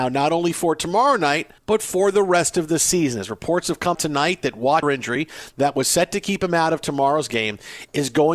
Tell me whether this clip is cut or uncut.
cut